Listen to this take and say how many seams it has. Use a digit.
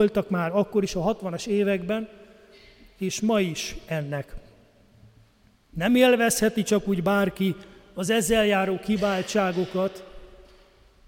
0